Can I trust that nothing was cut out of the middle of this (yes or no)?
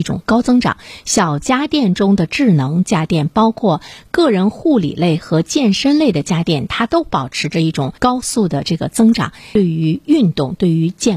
no